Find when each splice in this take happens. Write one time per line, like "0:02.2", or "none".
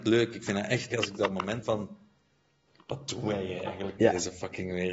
0:00.9
0:01.6
0:04.0